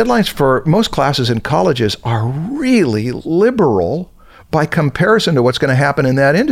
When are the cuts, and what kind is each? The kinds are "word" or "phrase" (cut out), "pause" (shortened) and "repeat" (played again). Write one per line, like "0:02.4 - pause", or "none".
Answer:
none